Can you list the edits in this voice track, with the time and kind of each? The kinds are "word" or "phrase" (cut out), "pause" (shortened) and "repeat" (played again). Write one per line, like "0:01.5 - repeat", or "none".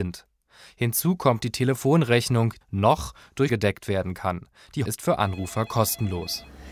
0:01.4 - word
0:02.6 - word
0:03.5 - word
0:04.9 - word